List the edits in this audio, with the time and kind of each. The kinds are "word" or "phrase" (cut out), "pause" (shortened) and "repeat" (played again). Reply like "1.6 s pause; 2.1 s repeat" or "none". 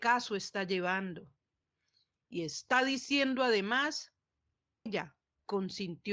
4.9 s word